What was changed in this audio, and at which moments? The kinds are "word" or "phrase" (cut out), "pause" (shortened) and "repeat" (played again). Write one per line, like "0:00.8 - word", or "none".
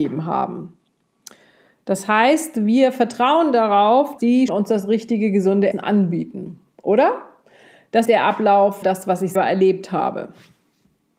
0:04.2 - word
0:04.5 - word
0:05.7 - word
0:08.0 - phrase
0:08.8 - word
0:09.3 - word